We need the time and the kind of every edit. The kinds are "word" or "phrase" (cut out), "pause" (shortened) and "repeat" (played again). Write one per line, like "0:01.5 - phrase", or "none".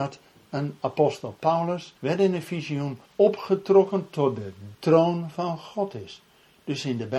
0:02.0 - pause
0:03.1 - pause
0:04.7 - phrase